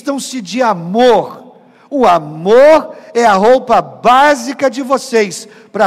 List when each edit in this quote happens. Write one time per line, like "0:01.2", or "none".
none